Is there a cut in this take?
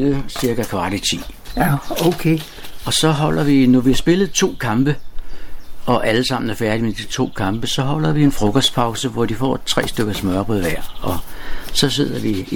no; 0 cuts

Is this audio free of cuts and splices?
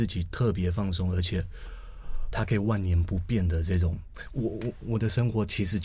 no; 1 cut; at 2.3 s

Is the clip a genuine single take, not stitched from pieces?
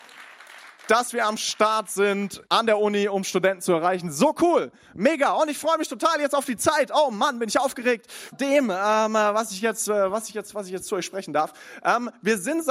no; 2 cuts; at 2.5 s, 8.3 s

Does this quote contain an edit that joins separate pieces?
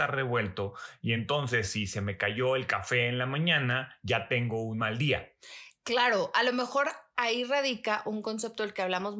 no; 0 cuts

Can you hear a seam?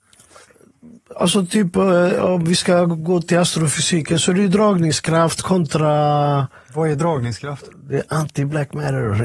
no; 0 cuts

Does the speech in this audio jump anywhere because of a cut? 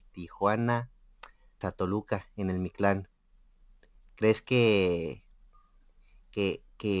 yes; 1 cut; at 1.6 s

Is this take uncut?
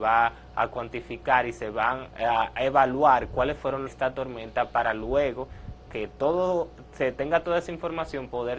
no; 3 cuts; at 2.1 s, 3.9 s, 5.9 s

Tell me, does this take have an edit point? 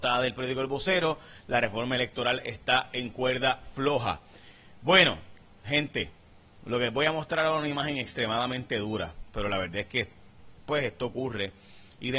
no; 0 cuts

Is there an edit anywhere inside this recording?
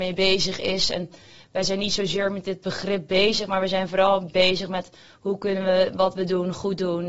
no; 0 cuts

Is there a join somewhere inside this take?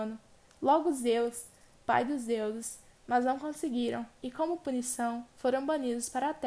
no; 0 cuts

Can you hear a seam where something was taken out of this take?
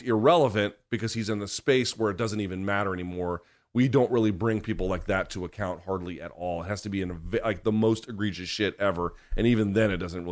no; 0 cuts

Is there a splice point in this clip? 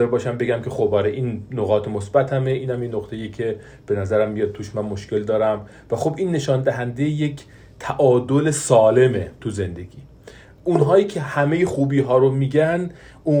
no; 0 cuts

